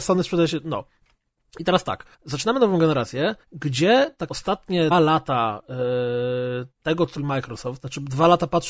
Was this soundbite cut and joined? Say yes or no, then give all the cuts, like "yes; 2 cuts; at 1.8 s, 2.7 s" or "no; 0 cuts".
yes; 5 cuts; at 2.1 s, 3.4 s, 4.3 s, 4.9 s, 7.2 s